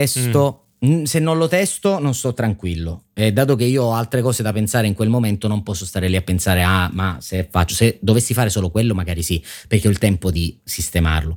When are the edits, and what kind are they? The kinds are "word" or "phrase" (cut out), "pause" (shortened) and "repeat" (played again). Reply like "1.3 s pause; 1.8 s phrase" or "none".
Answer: none